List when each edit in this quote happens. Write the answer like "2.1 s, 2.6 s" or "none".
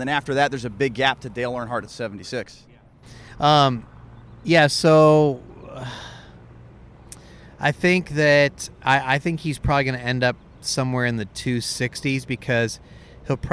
none

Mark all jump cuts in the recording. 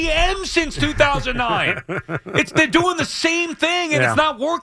none

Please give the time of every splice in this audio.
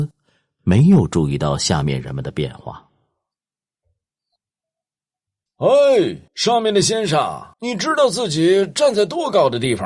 6.3 s, 7.5 s

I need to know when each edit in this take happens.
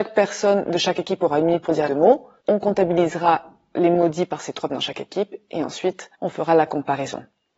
1.9 s, 4.7 s, 6.2 s

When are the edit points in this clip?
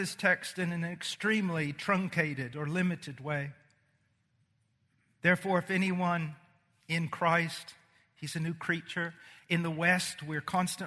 none

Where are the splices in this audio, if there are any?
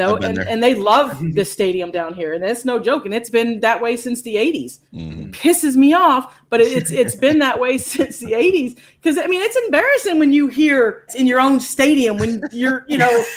4.9 s, 11.1 s

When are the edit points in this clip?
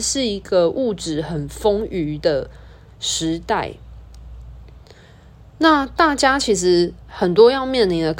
none

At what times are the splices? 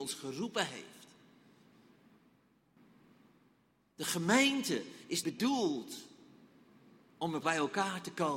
5.2 s, 7.4 s

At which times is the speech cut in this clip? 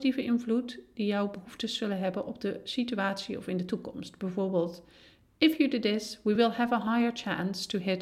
none

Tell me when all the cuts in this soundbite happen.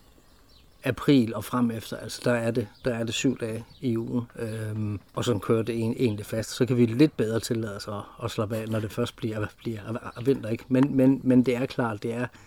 5.1 s

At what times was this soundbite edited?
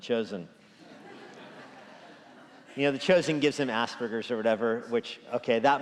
none

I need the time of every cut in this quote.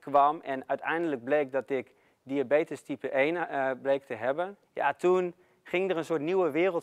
4.6 s

